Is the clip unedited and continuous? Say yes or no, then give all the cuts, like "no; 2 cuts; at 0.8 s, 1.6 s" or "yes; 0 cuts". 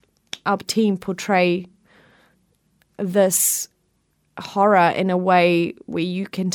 yes; 0 cuts